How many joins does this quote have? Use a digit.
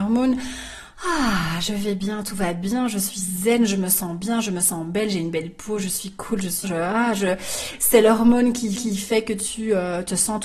2